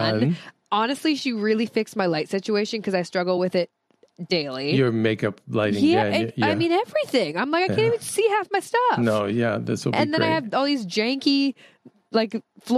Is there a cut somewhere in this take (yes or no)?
no